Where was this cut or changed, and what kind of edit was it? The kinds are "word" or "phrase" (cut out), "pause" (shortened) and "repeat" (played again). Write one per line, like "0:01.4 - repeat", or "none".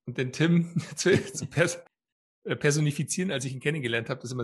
none